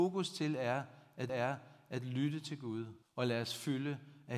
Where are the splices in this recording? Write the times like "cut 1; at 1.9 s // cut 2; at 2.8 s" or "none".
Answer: cut 1; at 1.3 s // cut 2; at 3.0 s